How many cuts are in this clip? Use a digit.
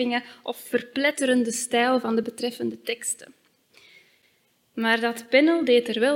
0